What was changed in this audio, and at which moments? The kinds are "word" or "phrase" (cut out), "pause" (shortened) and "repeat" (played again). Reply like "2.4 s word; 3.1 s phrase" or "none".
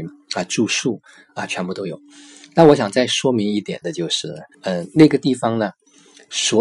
4.5 s pause